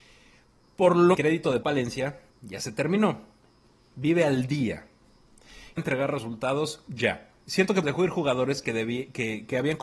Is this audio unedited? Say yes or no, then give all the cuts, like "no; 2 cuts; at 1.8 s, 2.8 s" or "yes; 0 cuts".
no; 5 cuts; at 1.1 s, 1.6 s, 2.3 s, 5.8 s, 7.8 s